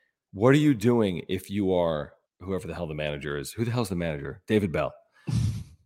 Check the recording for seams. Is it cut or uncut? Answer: cut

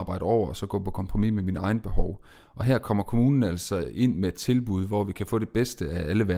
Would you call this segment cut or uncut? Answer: uncut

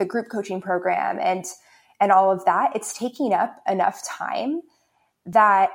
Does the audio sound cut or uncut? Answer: uncut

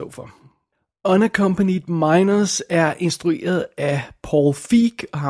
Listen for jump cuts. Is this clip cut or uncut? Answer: uncut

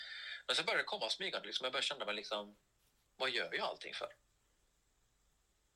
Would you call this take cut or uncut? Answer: uncut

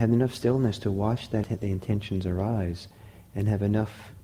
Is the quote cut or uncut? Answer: cut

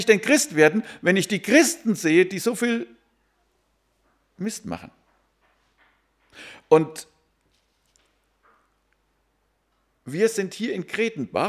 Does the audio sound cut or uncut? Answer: uncut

